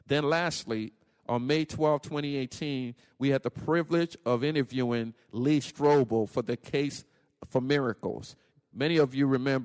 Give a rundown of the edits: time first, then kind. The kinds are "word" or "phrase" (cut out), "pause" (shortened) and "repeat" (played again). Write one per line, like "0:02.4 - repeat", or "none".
none